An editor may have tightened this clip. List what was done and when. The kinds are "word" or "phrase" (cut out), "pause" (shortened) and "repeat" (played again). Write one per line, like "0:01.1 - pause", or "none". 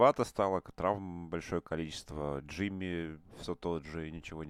none